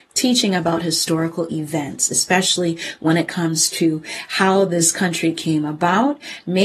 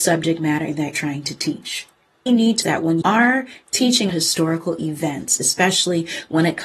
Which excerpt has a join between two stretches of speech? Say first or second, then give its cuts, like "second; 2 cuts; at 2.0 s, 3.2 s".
second; 5 cuts; at 0.9 s, 2.3 s, 2.6 s, 3.0 s, 4.1 s